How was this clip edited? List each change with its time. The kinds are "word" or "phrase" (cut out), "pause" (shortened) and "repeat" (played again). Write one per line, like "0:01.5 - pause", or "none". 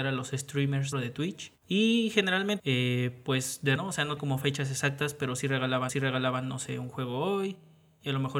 0:00.9 - word
0:01.6 - pause
0:02.6 - phrase
0:03.8 - word
0:04.2 - word
0:05.9 - repeat